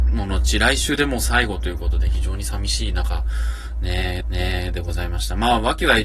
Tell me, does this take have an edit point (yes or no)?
yes